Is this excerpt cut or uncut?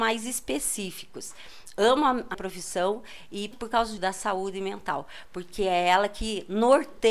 cut